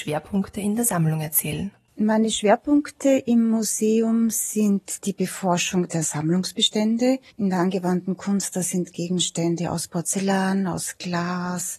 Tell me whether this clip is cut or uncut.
cut